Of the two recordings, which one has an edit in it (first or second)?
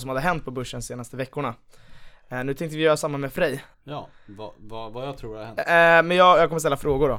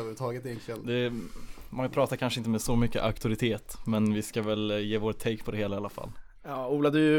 first